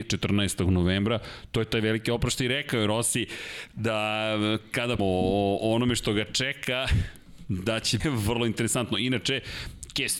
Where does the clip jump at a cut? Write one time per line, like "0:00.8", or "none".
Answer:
0:05.0
0:08.0